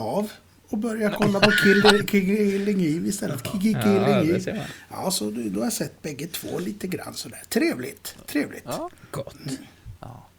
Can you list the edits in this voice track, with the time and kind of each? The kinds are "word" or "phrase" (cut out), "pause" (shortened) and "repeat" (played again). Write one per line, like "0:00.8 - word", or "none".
none